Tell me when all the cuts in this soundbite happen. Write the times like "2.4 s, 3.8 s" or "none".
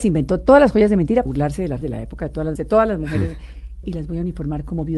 1.3 s, 1.8 s, 2.6 s, 3.8 s